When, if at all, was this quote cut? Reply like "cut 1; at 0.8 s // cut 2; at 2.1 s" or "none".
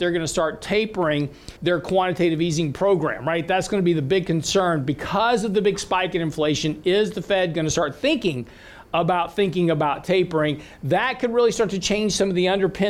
cut 1; at 1.6 s